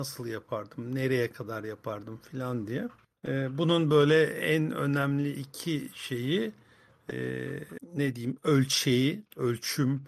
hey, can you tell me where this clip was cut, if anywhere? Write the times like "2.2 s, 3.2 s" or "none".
none